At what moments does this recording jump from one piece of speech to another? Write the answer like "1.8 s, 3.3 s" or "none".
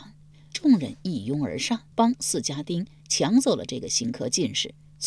1.9 s

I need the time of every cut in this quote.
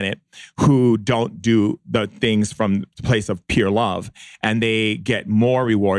none

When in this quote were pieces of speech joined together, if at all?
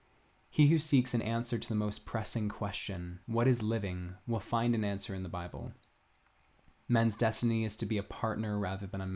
3.2 s

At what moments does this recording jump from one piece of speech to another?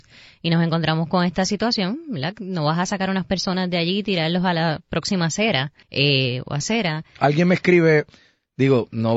5.8 s

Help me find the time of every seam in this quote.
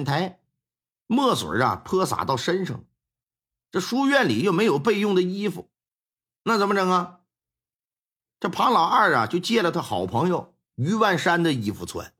none

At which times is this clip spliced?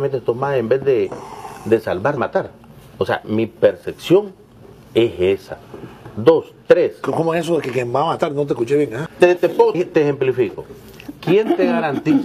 2.2 s, 2.9 s, 9.1 s, 9.4 s, 9.7 s

